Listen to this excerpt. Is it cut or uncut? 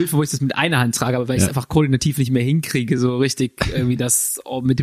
uncut